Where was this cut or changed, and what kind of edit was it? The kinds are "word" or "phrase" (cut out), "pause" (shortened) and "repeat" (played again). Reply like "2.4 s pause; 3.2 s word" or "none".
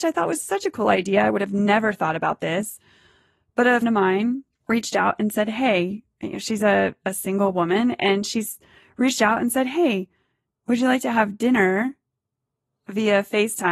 3.8 s word; 4.6 s pause

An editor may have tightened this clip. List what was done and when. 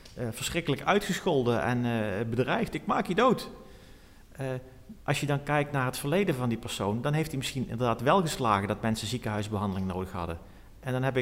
5.0 s pause

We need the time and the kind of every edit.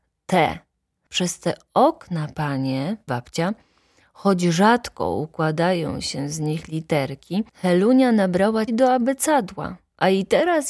3.1 s word; 7.5 s pause; 8.7 s word

